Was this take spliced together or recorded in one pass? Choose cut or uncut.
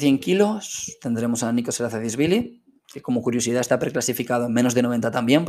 cut